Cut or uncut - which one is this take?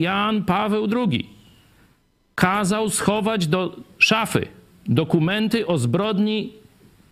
uncut